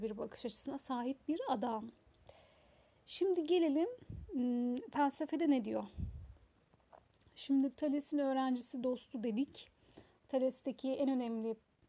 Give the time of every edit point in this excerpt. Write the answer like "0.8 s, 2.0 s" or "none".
none